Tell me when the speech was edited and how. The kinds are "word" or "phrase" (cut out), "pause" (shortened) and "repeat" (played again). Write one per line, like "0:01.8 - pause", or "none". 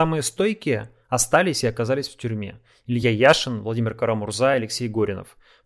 none